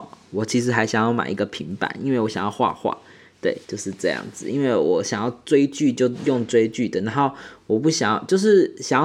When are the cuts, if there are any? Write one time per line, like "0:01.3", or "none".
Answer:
0:03.6